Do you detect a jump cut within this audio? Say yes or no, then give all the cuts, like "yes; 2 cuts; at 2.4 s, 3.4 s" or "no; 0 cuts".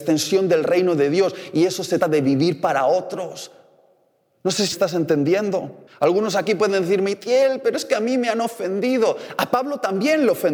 yes; 3 cuts; at 2.0 s, 4.7 s, 5.9 s